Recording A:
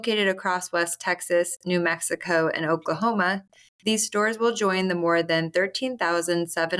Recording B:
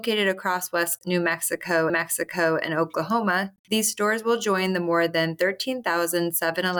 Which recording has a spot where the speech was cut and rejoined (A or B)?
B